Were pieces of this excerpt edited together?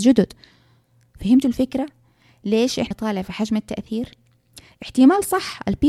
yes; 1 cut; at 2.9 s

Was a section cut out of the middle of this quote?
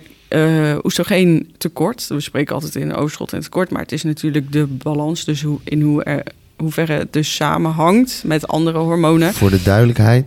no; 0 cuts

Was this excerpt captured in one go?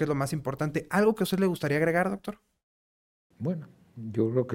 yes; 0 cuts

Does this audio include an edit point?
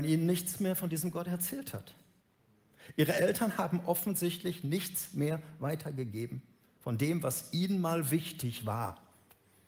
no; 0 cuts

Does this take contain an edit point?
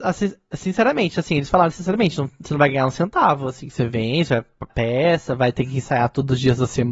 yes; 1 cut; at 4.7 s

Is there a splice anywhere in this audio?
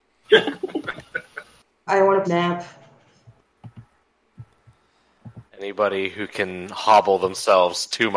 yes; 3 cuts; at 1.9 s, 2.2 s, 5.5 s

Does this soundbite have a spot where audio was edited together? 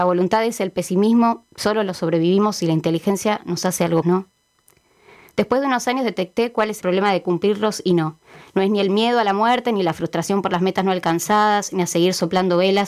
yes; 2 cuts; at 4.0 s, 6.8 s

